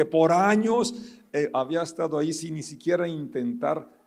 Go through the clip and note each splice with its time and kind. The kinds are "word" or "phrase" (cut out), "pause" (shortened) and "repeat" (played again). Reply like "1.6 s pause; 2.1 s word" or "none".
none